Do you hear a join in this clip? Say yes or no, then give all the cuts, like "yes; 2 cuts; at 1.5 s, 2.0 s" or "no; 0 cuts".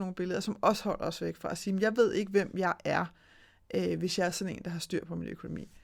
no; 0 cuts